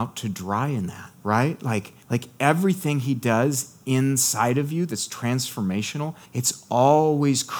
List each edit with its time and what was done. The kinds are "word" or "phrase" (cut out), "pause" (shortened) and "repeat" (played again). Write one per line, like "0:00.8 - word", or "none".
0:01.1 - pause
0:02.0 - pause
0:06.2 - pause